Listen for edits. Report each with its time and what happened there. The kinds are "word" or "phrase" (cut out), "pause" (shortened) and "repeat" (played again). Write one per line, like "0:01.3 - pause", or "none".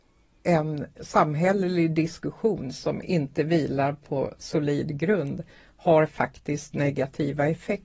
none

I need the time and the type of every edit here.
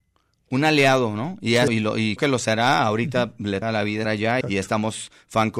0:01.7 - word
0:02.2 - word
0:03.6 - word
0:04.0 - word
0:04.4 - word

